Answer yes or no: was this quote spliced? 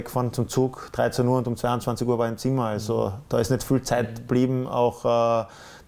no